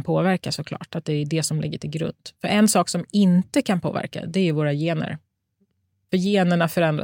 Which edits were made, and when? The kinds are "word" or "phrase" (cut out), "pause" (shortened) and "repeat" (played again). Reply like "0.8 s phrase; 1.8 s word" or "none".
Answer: none